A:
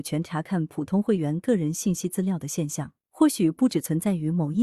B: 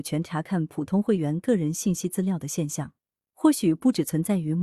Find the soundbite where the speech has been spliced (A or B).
A